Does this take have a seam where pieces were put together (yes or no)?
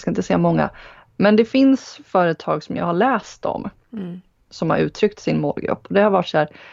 no